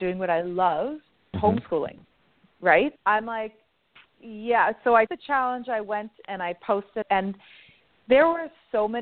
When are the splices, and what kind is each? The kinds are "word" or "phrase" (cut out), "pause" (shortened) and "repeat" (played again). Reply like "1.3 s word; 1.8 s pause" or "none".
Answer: 1.3 s word; 3.0 s word; 5.1 s word; 6.2 s word; 7.0 s word